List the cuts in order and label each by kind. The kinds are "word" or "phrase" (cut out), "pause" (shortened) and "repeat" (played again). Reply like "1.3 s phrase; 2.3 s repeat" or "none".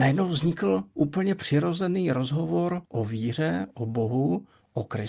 2.9 s pause